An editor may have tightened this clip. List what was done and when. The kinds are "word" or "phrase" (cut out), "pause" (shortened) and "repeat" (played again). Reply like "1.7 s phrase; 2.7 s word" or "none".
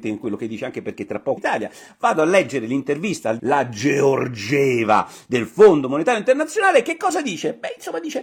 1.4 s phrase; 3.4 s word